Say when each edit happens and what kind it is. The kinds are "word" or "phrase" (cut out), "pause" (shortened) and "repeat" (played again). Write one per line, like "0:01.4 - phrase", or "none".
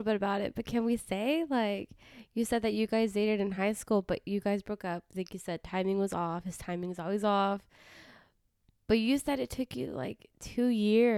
none